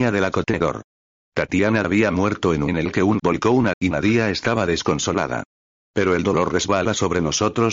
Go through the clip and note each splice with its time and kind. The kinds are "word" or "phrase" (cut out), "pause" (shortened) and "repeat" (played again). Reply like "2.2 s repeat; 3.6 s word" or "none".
1.8 s word; 2.7 s word; 3.2 s word; 3.7 s word

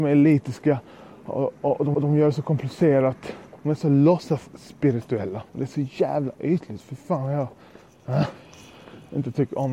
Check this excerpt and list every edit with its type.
1.9 s repeat; 3.6 s pause; 5.5 s pause

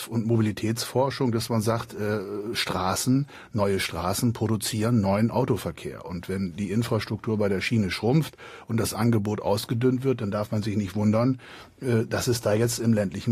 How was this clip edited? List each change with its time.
none

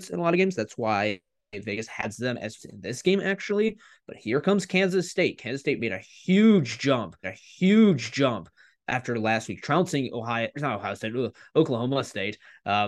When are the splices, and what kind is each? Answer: 2.6 s word; 7.2 s repeat; 10.5 s word

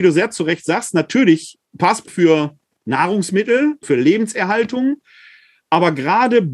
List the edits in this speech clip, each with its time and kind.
1.7 s pause; 2.1 s word; 3.8 s word

